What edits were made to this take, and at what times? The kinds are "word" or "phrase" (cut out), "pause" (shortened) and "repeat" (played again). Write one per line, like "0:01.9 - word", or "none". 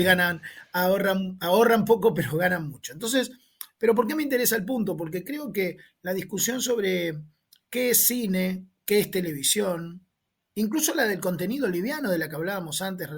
none